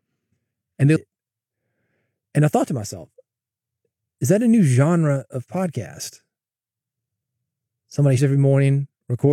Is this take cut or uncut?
cut